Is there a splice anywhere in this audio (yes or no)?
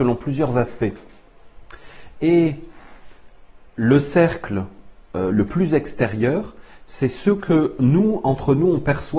yes